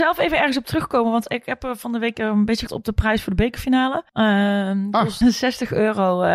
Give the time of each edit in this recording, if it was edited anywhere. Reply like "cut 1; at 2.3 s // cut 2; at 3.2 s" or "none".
cut 1; at 2.7 s // cut 2; at 4.1 s // cut 3; at 5.2 s